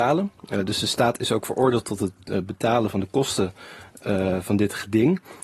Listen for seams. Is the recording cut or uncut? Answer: uncut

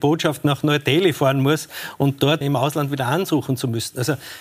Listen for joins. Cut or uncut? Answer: cut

